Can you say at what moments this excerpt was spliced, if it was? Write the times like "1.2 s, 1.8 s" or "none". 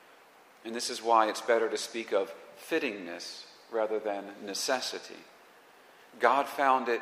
none